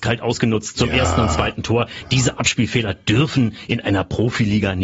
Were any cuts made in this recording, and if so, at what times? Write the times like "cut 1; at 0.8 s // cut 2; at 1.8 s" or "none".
none